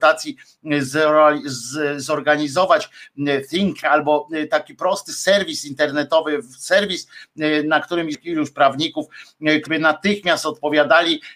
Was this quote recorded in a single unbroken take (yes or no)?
no